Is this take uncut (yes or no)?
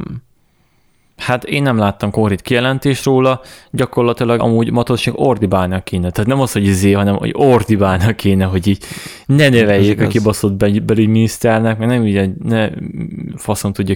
no